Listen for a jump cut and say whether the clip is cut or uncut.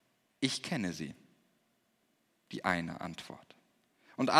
uncut